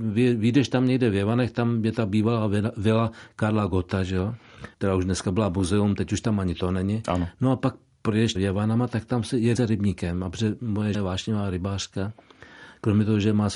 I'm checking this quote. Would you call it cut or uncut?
cut